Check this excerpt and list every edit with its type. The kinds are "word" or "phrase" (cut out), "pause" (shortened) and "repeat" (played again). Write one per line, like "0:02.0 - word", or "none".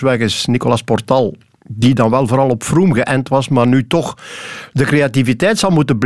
none